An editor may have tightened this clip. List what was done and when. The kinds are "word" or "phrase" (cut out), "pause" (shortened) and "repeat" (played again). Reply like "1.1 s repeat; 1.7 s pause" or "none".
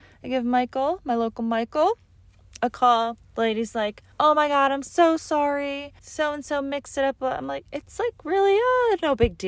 3.3 s pause; 4.1 s pause; 6.0 s pause